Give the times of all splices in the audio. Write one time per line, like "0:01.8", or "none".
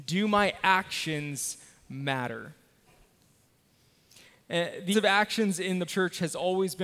0:04.9
0:05.9